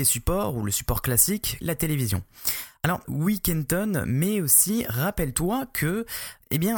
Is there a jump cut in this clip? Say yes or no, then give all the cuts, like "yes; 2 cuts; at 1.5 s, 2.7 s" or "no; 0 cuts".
yes; 2 cuts; at 1.6 s, 3.0 s